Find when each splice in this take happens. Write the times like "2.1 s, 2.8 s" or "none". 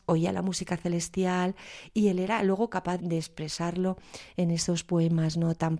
3.0 s